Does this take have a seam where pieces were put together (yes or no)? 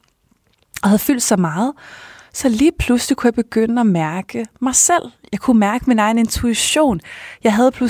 no